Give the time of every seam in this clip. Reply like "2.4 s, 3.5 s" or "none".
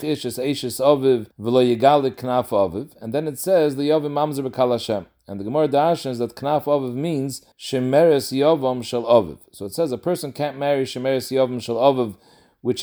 1.3 s, 7.5 s